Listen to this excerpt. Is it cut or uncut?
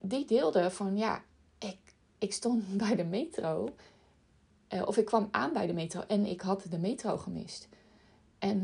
uncut